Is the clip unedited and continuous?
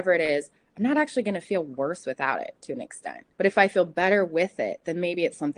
no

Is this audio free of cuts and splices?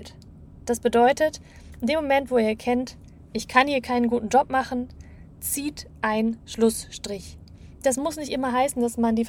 yes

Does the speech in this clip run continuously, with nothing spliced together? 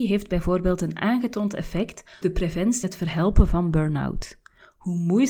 no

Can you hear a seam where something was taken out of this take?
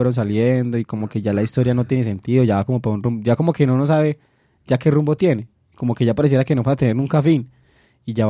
no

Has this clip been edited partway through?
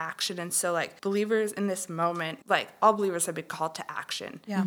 yes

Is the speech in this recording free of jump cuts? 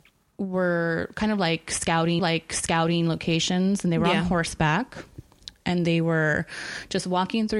no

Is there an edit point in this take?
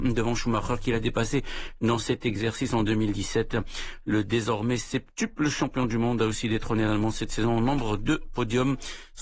no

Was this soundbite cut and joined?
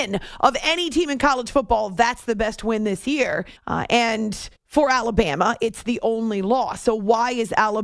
yes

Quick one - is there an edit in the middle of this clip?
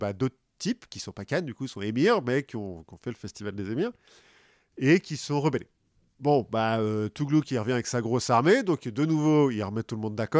no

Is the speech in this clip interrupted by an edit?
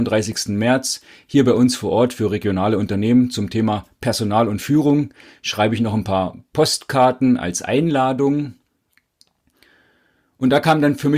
no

